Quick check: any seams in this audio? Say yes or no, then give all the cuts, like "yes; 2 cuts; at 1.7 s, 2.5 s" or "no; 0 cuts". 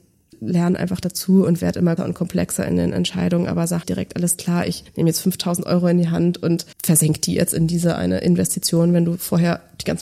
yes; 3 cuts; at 2.0 s, 3.8 s, 6.7 s